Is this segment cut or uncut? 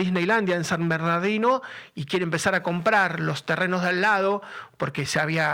uncut